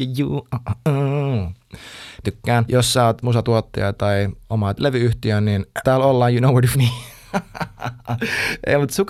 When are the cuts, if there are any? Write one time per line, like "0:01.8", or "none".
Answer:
0:02.2
0:02.7
0:03.2
0:04.8
0:05.8
0:06.7